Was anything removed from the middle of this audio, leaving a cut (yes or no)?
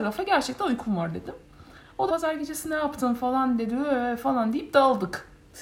yes